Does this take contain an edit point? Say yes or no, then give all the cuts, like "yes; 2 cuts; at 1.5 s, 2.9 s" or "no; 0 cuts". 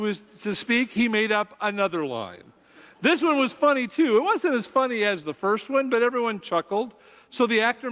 no; 0 cuts